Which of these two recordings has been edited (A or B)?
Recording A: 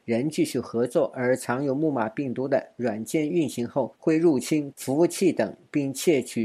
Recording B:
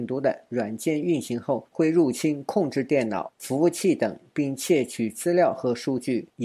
A